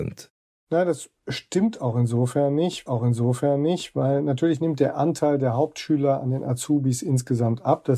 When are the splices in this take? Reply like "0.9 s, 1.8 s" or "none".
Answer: 2.9 s